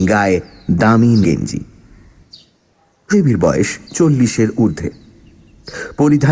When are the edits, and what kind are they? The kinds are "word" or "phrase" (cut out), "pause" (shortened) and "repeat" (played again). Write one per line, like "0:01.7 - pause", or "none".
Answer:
0:01.2 - word
0:03.1 - word
0:03.9 - pause

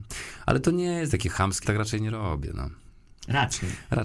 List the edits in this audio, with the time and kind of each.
0:01.1 - word
0:01.6 - word

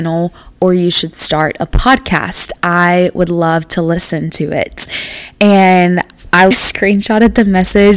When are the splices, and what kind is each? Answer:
0:06.5 - word

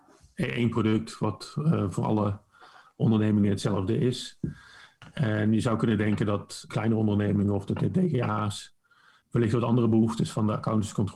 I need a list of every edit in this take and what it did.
0:06.7 - word
0:09.2 - word

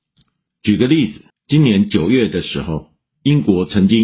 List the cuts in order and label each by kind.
0:01.3 - pause

